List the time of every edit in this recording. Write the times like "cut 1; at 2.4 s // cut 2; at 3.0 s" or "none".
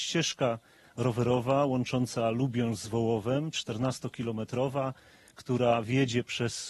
none